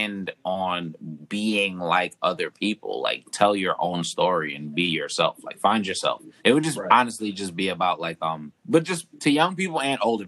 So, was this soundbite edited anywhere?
yes; 3 cuts; at 6.4 s, 8.6 s, 9.1 s

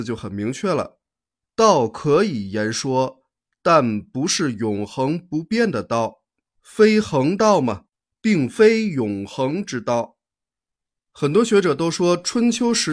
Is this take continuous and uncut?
yes; 0 cuts

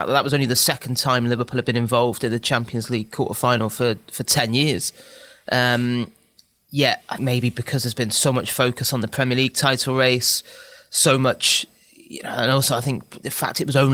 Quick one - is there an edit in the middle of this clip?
yes; 1 cut; at 7.2 s

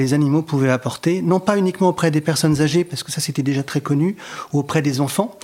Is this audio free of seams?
yes; 0 cuts

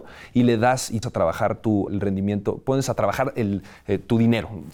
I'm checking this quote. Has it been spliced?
yes; 2 cuts; at 1.0 s, 1.9 s

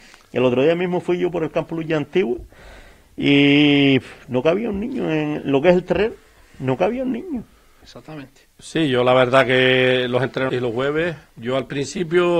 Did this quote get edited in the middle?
yes; 1 cut; at 10.5 s

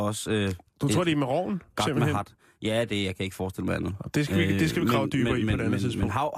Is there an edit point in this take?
no; 0 cuts

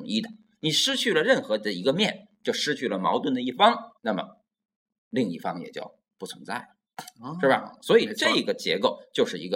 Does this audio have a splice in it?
yes; 1 cut; at 4.0 s

